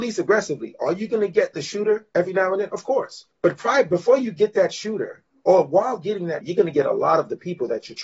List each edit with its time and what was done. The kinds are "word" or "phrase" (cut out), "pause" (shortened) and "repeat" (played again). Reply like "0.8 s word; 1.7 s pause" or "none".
3.3 s pause; 6.4 s word